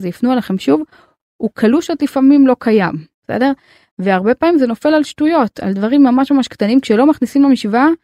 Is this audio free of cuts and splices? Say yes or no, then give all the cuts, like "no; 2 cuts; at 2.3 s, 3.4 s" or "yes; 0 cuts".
yes; 0 cuts